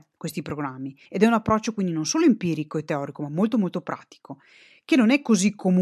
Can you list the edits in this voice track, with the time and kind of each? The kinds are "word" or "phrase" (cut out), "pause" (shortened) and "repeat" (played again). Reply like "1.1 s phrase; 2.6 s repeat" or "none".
1.1 s pause